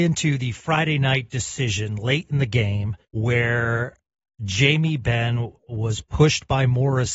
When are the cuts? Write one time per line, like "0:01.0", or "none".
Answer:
0:03.0
0:05.6

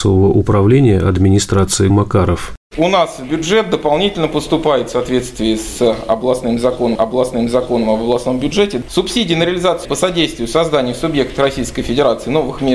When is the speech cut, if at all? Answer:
0:01.9
0:06.9
0:09.8

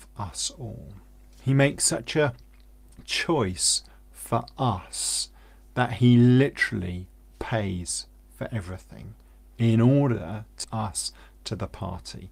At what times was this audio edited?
0:10.6

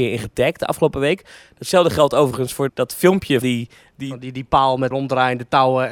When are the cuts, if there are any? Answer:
0:02.7
0:03.4
0:04.9

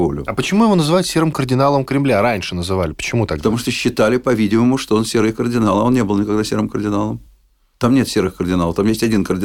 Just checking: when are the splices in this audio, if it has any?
none

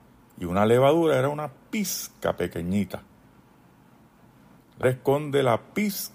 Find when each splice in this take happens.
0:04.8

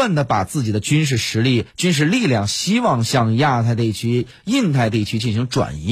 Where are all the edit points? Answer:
0:01.7

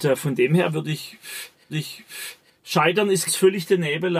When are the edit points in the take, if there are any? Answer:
0:01.7
0:03.3

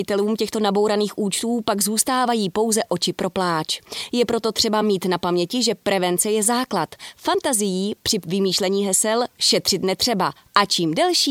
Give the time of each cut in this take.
none

